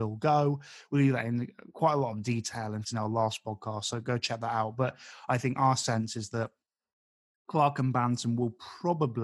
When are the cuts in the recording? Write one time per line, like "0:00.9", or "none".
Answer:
0:02.8